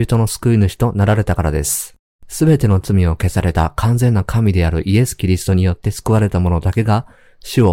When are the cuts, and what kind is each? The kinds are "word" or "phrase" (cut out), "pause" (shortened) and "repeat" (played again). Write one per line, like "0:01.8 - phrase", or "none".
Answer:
0:02.1 - pause